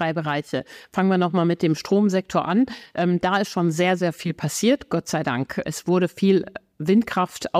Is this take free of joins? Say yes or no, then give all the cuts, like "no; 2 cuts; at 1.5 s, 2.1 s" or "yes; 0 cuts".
yes; 0 cuts